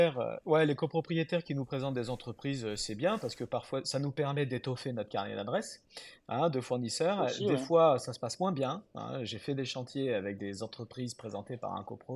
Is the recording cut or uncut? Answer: uncut